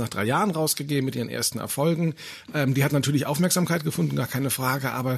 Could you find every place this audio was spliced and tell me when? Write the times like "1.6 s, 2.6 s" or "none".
none